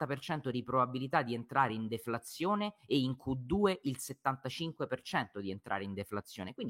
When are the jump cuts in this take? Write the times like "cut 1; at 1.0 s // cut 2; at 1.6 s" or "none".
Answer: none